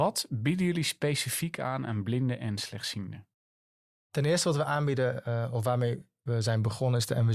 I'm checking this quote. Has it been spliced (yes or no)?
no